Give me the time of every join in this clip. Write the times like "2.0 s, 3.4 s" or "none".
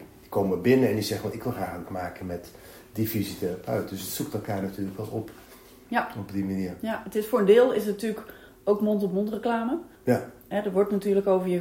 1.9 s, 9.9 s

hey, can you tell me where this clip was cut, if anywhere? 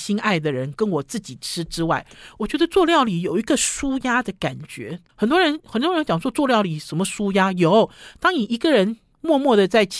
5.1 s

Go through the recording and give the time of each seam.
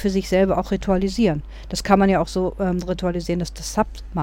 none

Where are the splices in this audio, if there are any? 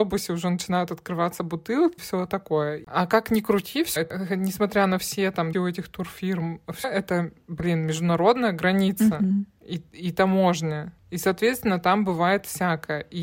2.0 s, 4.0 s, 5.5 s, 6.8 s

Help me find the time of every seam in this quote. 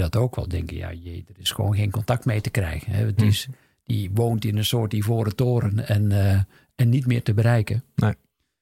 none

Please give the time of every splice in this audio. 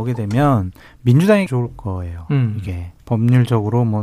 1.5 s, 3.0 s

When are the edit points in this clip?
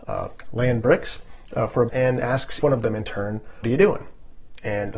1.9 s, 2.6 s, 3.6 s

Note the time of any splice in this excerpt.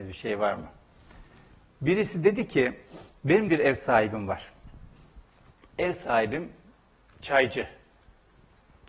3.5 s

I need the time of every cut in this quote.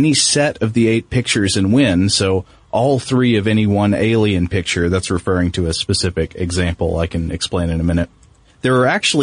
none

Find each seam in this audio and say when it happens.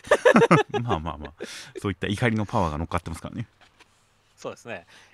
none

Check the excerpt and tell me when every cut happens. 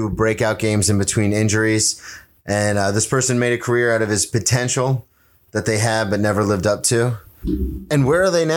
none

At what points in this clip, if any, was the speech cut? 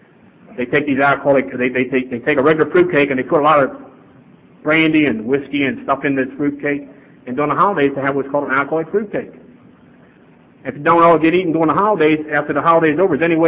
none

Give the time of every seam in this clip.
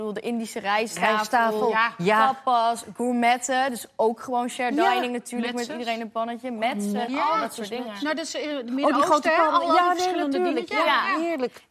none

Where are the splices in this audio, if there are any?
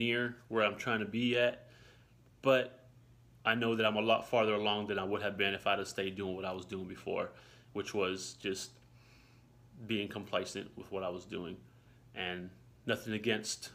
none

